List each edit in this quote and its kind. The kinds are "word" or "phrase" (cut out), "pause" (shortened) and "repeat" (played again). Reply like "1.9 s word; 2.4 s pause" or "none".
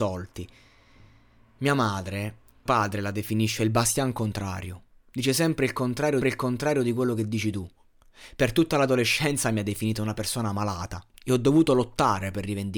2.7 s word; 6.2 s repeat; 11.1 s pause